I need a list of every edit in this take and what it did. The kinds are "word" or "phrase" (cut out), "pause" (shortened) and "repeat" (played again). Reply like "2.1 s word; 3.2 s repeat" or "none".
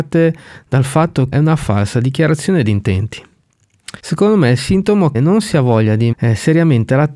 1.3 s phrase; 4.0 s pause; 5.1 s word; 6.1 s word